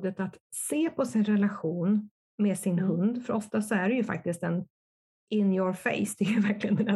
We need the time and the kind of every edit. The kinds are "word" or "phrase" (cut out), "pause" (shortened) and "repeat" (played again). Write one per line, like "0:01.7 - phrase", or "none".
none